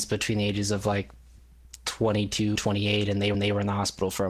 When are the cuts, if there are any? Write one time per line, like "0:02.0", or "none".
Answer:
0:02.6
0:03.3